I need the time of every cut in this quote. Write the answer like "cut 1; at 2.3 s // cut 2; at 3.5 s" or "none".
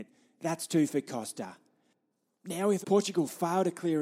cut 1; at 2.8 s